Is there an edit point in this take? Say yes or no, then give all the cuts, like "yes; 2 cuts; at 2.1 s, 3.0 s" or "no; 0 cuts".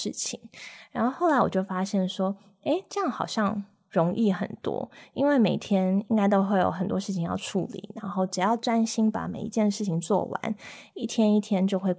no; 0 cuts